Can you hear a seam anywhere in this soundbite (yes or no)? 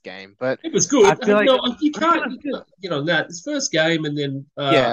no